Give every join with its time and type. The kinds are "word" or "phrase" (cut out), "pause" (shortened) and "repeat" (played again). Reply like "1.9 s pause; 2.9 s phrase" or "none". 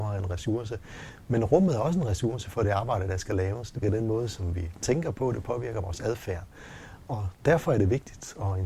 3.8 s word